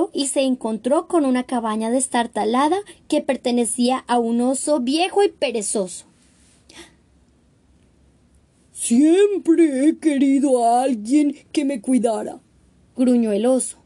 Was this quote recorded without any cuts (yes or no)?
yes